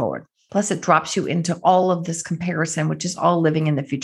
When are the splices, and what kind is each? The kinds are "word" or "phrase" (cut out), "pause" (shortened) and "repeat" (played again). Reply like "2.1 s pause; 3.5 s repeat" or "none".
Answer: none